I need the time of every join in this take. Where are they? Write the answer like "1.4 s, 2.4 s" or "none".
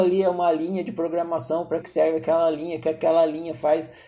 1.8 s

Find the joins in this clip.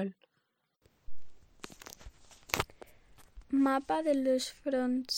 none

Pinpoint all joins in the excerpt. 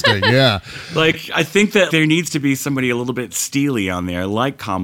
1.9 s

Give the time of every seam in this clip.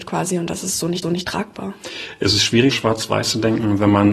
1.0 s, 2.7 s

